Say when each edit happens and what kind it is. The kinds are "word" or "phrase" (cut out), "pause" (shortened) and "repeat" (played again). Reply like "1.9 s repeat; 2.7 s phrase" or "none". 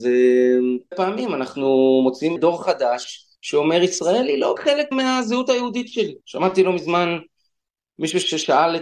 0.9 s word; 2.4 s word; 3.3 s pause; 4.6 s word; 4.9 s word; 6.2 s pause